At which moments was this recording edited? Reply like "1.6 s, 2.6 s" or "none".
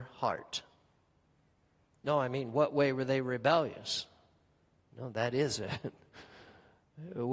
none